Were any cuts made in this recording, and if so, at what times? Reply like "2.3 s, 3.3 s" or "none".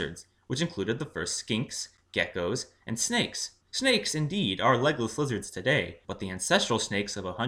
3.6 s, 6.0 s